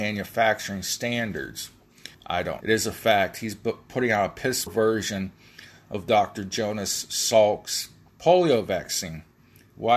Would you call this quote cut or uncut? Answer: cut